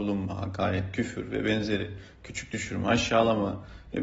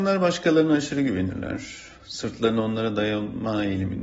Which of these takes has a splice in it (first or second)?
second